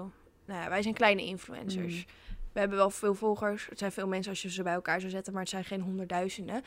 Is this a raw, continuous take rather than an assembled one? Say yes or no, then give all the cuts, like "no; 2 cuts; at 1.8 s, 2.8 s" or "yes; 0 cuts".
yes; 0 cuts